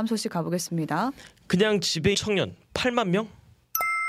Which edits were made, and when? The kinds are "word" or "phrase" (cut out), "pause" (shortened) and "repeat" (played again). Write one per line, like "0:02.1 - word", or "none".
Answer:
0:02.1 - word